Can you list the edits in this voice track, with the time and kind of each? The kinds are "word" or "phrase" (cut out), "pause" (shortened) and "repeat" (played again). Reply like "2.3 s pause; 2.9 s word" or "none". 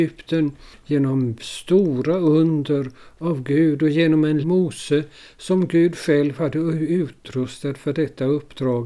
4.4 s word